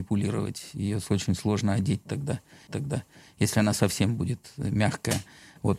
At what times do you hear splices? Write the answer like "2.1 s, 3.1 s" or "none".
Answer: 2.7 s